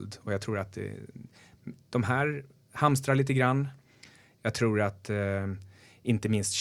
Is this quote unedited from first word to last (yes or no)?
yes